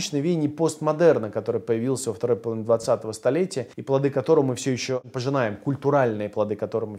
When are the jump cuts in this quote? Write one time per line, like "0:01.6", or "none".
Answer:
0:03.7